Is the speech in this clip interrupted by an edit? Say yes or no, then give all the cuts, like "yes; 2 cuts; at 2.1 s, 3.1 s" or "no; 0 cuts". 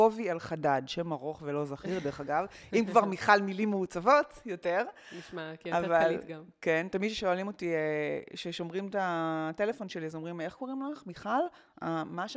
no; 0 cuts